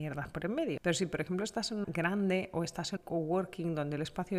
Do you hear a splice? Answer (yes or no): yes